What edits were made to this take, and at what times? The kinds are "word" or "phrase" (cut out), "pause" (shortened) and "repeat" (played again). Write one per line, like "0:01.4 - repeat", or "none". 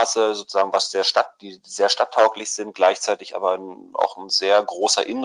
none